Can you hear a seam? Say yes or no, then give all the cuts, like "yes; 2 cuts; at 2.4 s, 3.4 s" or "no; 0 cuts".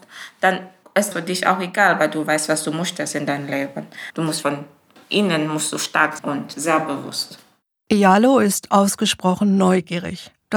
yes; 3 cuts; at 1.1 s, 4.4 s, 6.2 s